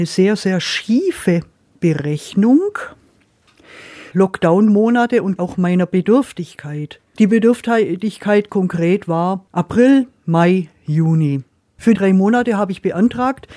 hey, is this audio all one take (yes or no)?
no